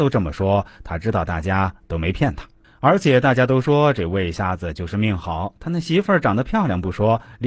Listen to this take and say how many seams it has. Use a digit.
1